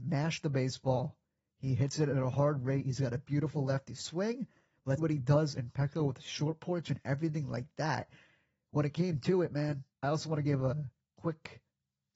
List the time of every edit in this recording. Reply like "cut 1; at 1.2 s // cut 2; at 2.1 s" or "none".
cut 1; at 5.0 s // cut 2; at 9.9 s